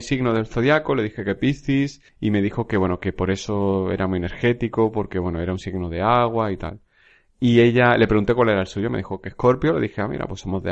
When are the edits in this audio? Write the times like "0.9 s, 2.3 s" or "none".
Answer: 2.1 s